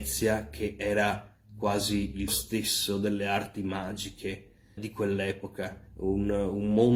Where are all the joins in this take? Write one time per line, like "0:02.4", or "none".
0:02.3
0:04.8
0:05.9